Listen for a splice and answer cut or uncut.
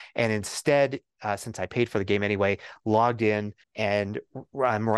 cut